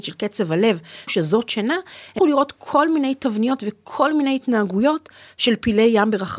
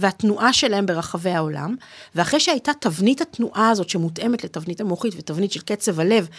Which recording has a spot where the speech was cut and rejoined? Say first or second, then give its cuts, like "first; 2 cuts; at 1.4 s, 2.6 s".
first; 2 cuts; at 1.1 s, 2.2 s